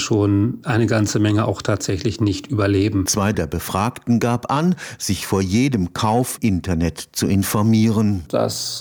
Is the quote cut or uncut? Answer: cut